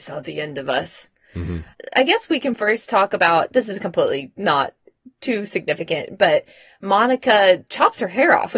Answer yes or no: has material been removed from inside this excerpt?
no